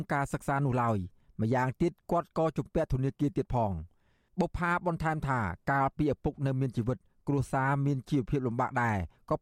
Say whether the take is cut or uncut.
uncut